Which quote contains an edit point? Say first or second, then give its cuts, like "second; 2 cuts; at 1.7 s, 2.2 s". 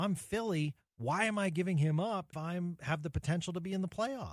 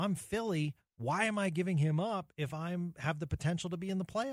first; 1 cut; at 2.3 s